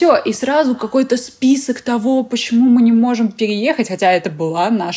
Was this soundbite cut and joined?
no; 0 cuts

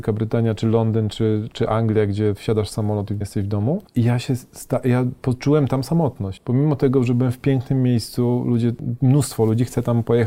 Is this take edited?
yes; 1 cut; at 3.2 s

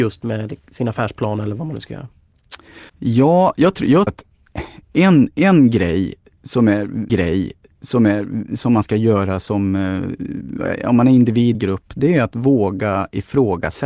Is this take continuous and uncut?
no; 4 cuts; at 2.9 s, 4.1 s, 7.1 s, 11.5 s

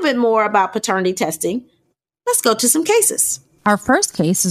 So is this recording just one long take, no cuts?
yes; 0 cuts

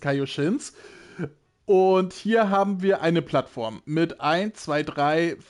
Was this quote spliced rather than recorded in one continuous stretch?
no; 0 cuts

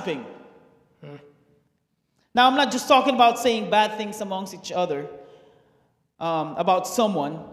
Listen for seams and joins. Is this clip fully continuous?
yes; 0 cuts

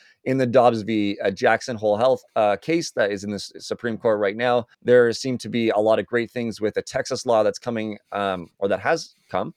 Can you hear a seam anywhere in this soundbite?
yes; 2 cuts; at 2.3 s, 4.7 s

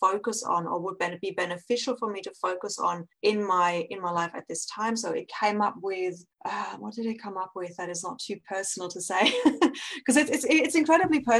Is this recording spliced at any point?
yes; 2 cuts; at 3.1 s, 6.3 s

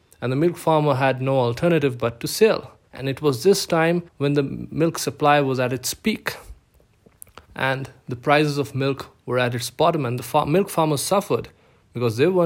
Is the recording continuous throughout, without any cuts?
no; 3 cuts; at 2.9 s, 4.1 s, 7.5 s

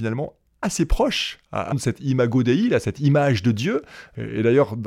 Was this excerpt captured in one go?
no; 1 cut; at 1.7 s

